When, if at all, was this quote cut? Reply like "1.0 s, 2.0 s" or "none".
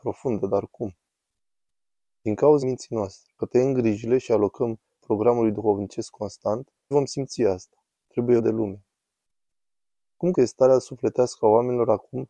2.6 s, 3.4 s, 5.0 s, 6.9 s, 8.4 s, 10.3 s